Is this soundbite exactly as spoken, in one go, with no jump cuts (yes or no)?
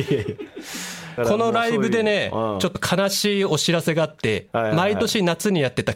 no